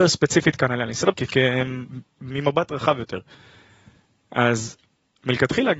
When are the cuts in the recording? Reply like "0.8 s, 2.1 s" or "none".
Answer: 1.1 s